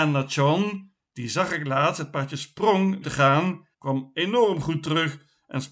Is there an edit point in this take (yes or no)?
yes